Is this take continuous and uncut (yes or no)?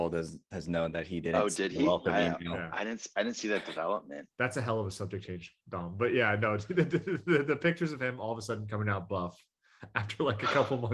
yes